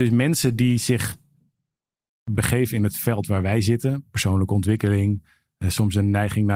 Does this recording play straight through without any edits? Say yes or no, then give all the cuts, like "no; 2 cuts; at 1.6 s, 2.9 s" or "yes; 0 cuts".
yes; 0 cuts